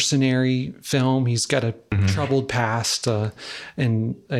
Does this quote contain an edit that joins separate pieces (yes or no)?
no